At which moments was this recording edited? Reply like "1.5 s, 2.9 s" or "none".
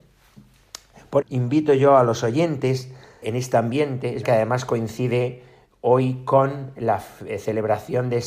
1.2 s, 3.2 s, 4.2 s